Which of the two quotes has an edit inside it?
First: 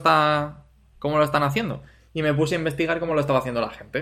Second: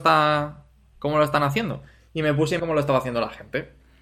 second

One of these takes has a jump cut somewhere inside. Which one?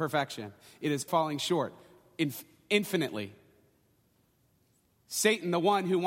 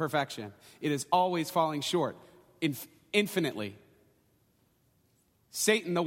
first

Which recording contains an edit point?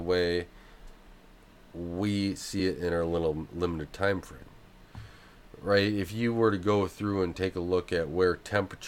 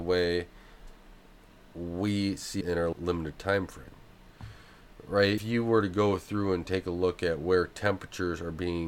second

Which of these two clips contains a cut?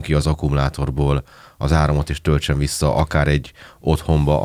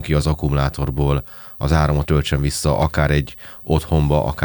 second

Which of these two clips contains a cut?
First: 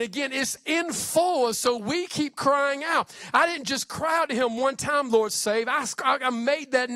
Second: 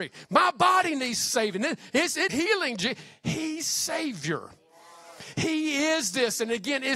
second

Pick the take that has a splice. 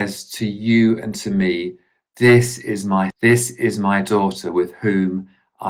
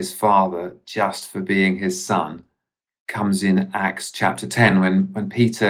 first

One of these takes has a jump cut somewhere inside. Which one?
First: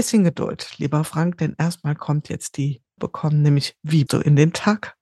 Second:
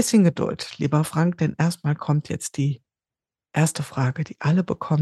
first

